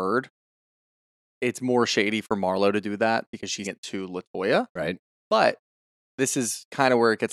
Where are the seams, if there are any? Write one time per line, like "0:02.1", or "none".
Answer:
0:03.6